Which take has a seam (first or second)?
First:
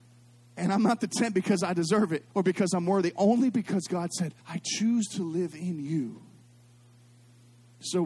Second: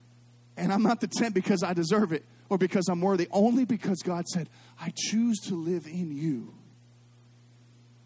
first